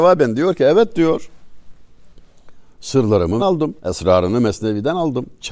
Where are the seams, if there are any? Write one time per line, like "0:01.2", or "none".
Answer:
0:03.4
0:03.8